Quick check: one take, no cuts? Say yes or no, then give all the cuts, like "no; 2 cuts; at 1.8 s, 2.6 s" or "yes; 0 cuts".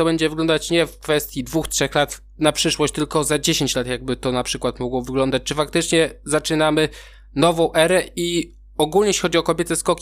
yes; 0 cuts